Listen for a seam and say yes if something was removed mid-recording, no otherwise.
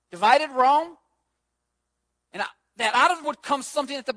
yes